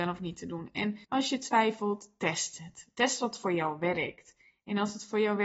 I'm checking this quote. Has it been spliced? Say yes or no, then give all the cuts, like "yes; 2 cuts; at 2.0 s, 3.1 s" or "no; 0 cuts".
yes; 1 cut; at 1.0 s